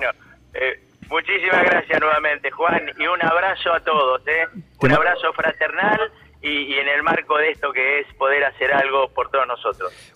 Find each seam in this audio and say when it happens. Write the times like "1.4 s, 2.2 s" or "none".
none